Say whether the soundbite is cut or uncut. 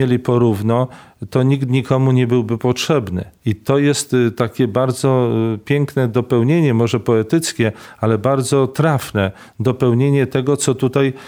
uncut